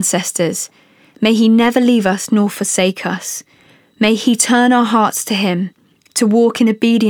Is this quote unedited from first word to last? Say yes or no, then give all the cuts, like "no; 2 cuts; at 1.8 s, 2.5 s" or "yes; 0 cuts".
yes; 0 cuts